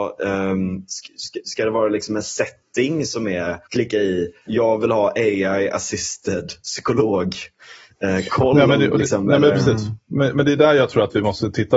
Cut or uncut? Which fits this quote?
cut